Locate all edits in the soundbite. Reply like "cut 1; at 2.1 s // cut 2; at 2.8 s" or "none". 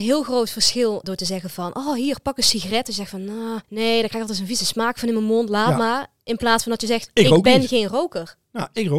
cut 1; at 1.0 s // cut 2; at 3.6 s